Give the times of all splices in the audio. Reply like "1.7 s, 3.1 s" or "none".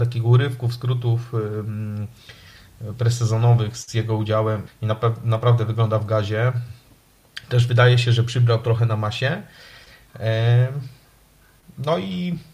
4.7 s